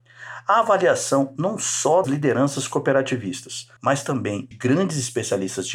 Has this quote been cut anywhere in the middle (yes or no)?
yes